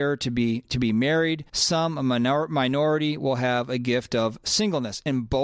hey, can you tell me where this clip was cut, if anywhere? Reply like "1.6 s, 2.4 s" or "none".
1.5 s